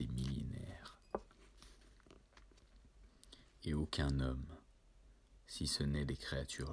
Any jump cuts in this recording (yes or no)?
no